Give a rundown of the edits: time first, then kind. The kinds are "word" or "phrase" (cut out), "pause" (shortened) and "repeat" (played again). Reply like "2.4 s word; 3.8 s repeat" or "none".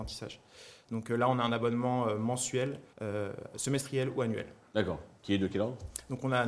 2.9 s pause